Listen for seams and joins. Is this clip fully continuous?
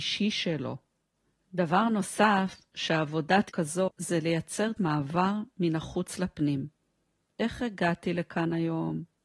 no; 3 cuts; at 3.5 s, 3.9 s, 4.8 s

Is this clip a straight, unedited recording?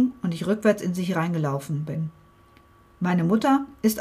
yes; 0 cuts

